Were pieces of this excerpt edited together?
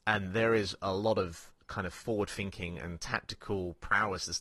no; 0 cuts

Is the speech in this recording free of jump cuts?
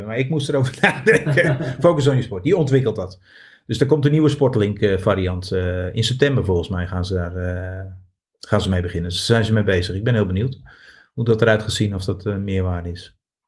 yes; 0 cuts

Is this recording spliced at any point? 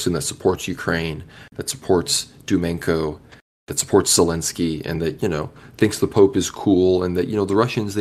no; 0 cuts

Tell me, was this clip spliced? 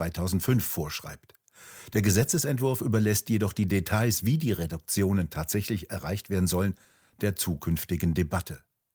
no; 0 cuts

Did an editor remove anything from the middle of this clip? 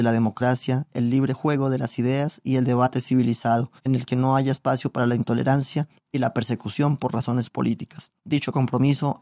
yes; 2 cuts; at 3.8 s, 8.2 s

